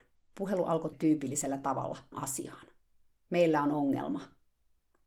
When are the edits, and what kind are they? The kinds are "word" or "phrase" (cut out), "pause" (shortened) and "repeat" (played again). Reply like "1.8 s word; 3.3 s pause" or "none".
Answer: 0.9 s word; 2.1 s word

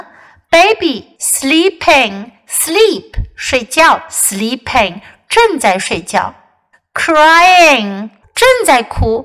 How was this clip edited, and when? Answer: 1.2 s word; 8.2 s word

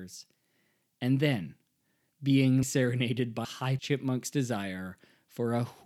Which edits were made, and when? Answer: 2.6 s word; 3.4 s word; 3.8 s word

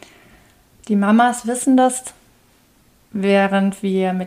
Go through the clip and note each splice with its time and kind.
none

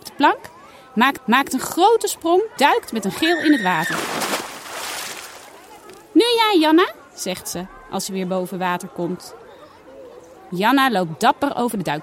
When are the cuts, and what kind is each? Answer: 1.2 s repeat; 2.6 s word

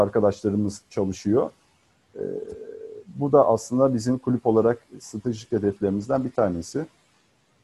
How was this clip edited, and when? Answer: none

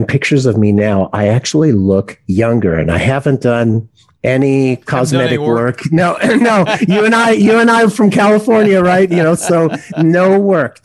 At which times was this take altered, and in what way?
none

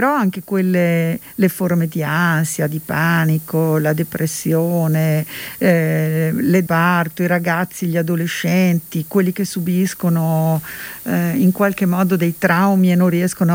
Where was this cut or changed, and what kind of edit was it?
6.7 s phrase

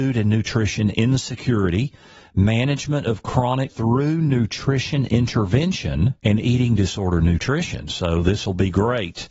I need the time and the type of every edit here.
3.7 s word; 6.2 s pause

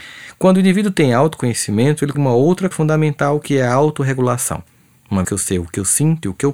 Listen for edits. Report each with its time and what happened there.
2.1 s word; 2.7 s word; 5.2 s word

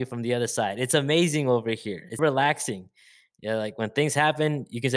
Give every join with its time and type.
2.2 s word

